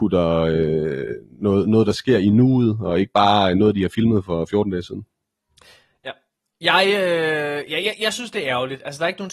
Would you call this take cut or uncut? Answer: uncut